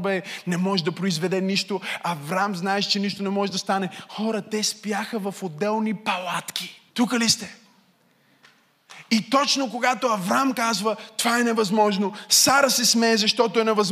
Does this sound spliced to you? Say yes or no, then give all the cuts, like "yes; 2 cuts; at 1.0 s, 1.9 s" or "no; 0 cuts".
yes; 1 cut; at 6.9 s